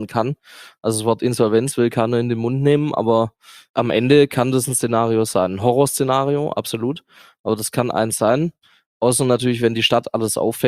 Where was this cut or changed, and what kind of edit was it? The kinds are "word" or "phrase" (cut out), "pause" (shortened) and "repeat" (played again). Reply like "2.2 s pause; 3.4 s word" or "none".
none